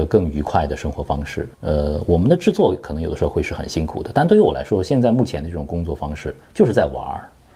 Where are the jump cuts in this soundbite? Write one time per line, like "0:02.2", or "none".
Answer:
0:01.5
0:06.4